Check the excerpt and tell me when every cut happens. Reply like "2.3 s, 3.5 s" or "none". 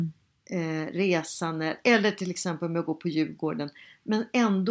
none